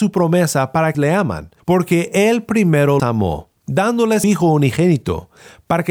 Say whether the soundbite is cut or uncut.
cut